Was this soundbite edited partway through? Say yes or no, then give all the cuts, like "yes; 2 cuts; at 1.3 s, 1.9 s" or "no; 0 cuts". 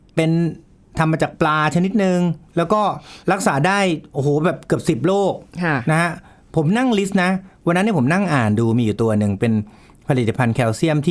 yes; 1 cut; at 3.2 s